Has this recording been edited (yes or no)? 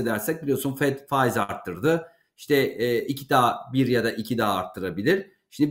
no